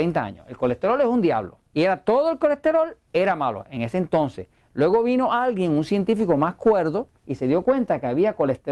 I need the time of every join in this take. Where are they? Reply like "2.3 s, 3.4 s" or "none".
1.7 s, 7.2 s